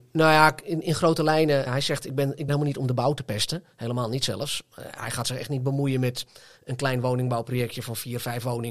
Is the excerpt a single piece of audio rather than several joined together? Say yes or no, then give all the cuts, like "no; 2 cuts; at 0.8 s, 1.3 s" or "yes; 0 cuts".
no; 2 cuts; at 1.7 s, 2.5 s